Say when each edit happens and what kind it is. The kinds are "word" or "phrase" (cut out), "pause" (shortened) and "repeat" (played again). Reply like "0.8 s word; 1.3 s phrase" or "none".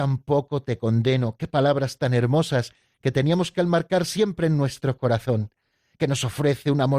none